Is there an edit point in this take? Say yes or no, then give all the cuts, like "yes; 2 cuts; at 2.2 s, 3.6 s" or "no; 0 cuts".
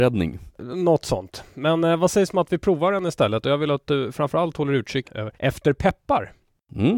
yes; 2 cuts; at 5.0 s, 5.4 s